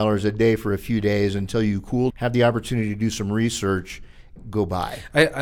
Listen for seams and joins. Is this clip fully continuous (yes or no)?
no